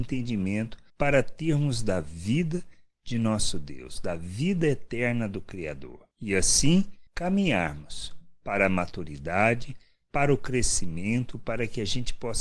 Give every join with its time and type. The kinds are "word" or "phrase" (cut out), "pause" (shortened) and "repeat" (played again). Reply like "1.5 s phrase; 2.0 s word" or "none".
none